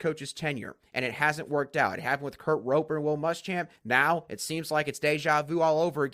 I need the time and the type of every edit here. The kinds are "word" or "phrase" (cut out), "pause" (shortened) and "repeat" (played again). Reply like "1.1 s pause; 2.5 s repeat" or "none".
3.8 s pause